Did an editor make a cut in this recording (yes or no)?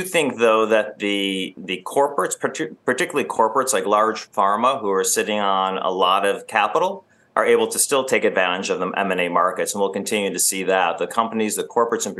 no